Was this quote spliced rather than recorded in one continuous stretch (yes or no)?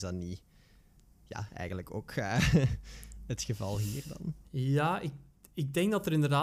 no